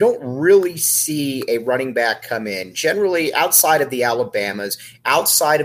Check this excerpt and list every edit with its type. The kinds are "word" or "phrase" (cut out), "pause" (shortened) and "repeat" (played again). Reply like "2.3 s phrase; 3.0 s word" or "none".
none